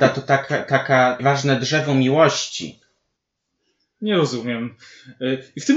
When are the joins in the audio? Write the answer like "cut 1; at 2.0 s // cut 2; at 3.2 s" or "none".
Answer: cut 1; at 1.2 s